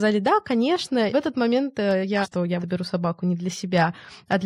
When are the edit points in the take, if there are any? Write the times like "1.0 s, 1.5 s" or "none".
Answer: 1.1 s, 2.2 s, 2.6 s